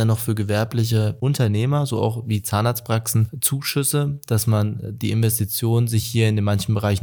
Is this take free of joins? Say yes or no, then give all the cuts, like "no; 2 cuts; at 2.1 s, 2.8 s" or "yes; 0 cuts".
yes; 0 cuts